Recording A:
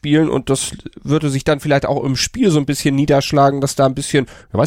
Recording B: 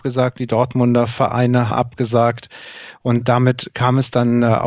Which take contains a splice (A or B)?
B